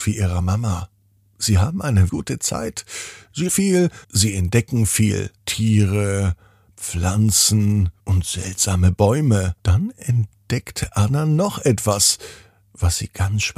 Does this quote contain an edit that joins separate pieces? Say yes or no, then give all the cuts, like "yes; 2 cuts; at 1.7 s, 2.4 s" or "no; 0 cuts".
yes; 6 cuts; at 2.1 s, 3.5 s, 4.0 s, 5.4 s, 8.0 s, 9.6 s